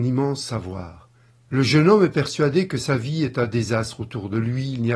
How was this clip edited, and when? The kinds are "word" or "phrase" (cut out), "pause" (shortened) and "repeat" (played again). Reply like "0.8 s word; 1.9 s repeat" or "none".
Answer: 1.3 s pause